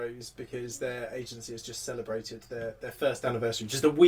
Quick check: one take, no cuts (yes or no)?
yes